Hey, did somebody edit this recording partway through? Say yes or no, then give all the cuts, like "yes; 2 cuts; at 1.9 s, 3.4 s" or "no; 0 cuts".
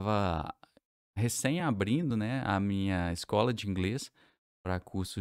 no; 0 cuts